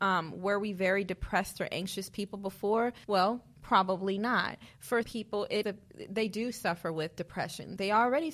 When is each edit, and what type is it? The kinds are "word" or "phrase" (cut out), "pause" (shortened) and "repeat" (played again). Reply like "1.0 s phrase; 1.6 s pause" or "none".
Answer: 3.0 s pause; 5.0 s word; 5.6 s word